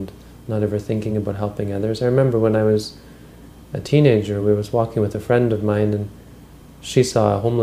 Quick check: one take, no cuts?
yes; 0 cuts

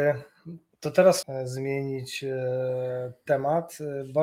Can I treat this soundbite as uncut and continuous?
no; 1 cut; at 1.2 s

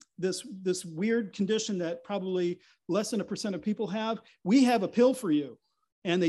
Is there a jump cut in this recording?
no; 0 cuts

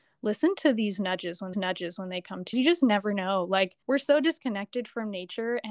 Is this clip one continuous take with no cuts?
no; 3 cuts; at 1.5 s, 2.5 s, 3.8 s

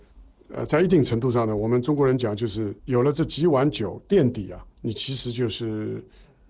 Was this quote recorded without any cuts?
no; 2 cuts; at 2.8 s, 4.7 s

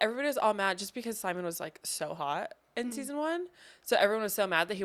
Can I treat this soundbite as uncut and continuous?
yes; 0 cuts

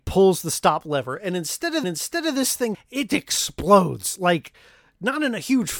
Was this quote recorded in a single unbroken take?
no; 3 cuts; at 1.8 s, 2.7 s, 3.1 s

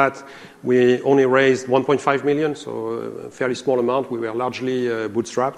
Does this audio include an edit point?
no; 0 cuts

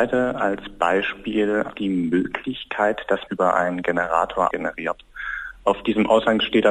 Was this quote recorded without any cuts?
no; 3 cuts; at 1.7 s, 3.3 s, 4.5 s

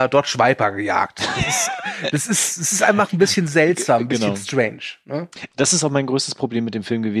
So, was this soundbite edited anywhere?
no; 0 cuts

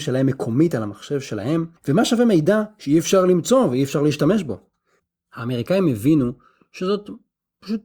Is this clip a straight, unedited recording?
no; 1 cut; at 1.8 s

